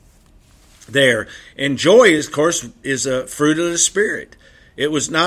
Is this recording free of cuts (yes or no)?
yes